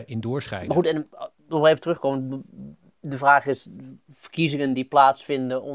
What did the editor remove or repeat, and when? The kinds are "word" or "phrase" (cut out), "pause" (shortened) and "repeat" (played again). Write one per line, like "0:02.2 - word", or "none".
none